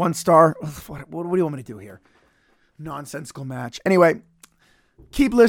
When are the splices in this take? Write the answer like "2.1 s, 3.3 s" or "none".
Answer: none